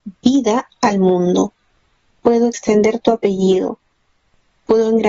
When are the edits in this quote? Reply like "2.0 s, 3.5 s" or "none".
none